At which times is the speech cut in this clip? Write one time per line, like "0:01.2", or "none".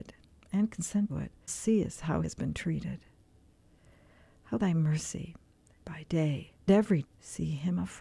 0:01.1
0:01.5
0:02.2
0:04.6
0:05.8
0:06.7
0:07.0